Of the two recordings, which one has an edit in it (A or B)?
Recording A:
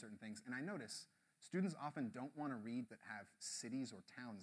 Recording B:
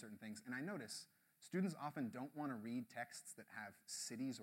A